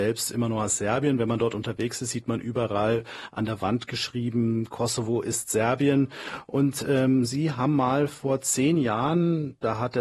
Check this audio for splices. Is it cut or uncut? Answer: uncut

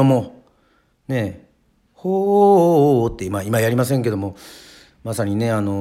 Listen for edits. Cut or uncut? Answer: uncut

